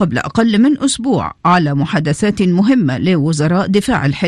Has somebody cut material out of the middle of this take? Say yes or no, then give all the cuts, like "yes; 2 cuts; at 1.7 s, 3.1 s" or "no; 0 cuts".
no; 0 cuts